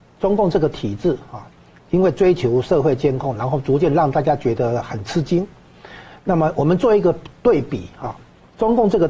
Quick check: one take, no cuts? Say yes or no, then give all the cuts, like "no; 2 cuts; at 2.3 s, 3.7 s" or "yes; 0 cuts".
yes; 0 cuts